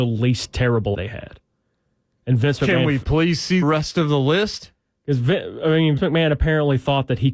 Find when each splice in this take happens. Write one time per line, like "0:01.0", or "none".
0:00.9
0:03.6
0:06.0